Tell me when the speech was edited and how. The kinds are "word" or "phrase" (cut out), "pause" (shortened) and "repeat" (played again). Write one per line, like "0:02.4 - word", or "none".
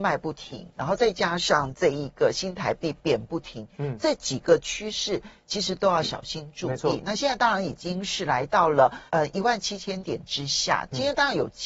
0:09.1 - pause